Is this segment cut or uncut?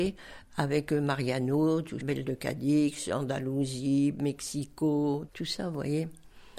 cut